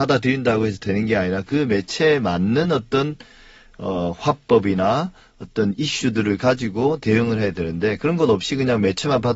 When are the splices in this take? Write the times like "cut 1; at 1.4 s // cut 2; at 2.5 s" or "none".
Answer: none